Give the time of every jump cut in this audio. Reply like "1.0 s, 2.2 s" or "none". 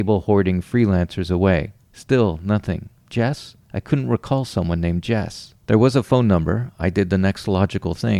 1.8 s, 3.6 s, 5.6 s